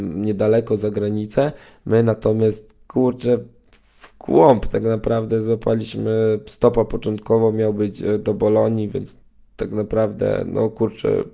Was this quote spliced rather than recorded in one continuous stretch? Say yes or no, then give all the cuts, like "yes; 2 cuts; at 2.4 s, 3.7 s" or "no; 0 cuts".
no; 0 cuts